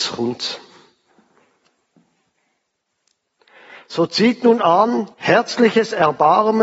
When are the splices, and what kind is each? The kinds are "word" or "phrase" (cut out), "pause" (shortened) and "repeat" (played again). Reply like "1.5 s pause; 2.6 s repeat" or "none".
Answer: 5.1 s pause